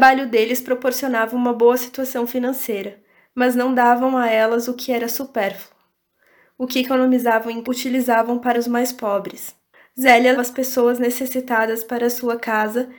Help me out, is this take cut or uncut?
cut